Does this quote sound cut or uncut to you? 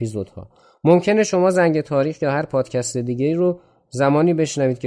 uncut